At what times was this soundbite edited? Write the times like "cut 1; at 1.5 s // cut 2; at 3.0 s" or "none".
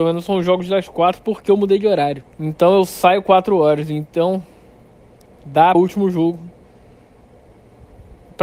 cut 1; at 2.3 s // cut 2; at 5.7 s